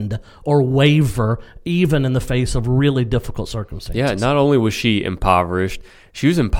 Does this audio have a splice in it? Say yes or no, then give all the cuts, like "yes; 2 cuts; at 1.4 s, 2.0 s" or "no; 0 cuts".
no; 0 cuts